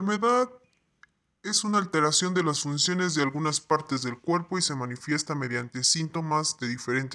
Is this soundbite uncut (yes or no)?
yes